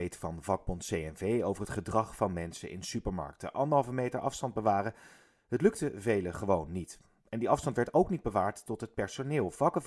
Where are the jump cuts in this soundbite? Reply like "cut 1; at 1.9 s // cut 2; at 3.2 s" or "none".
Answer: none